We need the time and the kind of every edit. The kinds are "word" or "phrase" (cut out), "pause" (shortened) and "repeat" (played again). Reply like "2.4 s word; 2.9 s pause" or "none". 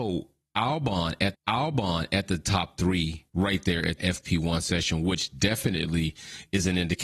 1.3 s repeat; 3.3 s pause; 4.0 s phrase

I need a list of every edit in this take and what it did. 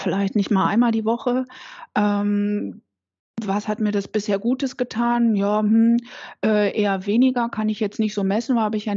none

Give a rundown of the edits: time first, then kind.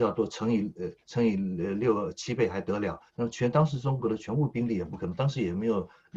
1.0 s pause; 3.1 s pause

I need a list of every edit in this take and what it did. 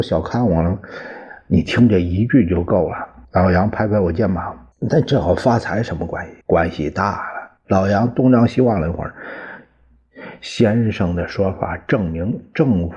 3.2 s pause; 4.7 s pause; 6.4 s pause; 7.6 s pause

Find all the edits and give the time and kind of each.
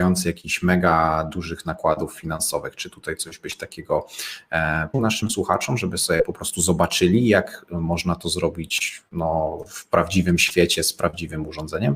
4.9 s word

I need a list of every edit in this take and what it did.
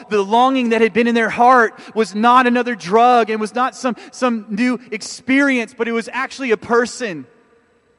none

